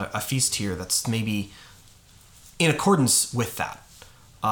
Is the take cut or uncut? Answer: cut